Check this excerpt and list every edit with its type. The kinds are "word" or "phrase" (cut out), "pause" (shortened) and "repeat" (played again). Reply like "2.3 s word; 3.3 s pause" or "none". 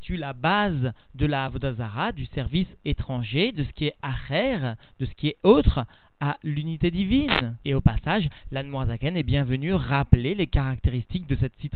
none